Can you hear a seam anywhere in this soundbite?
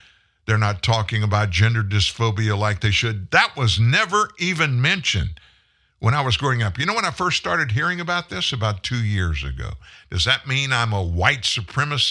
no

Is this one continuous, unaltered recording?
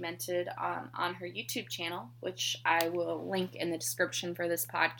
yes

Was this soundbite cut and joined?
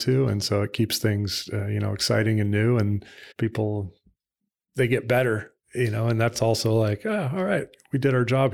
yes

